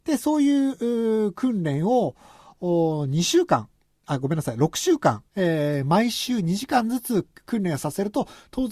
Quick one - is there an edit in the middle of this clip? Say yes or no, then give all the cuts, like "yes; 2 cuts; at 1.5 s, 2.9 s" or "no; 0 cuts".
yes; 1 cut; at 5.3 s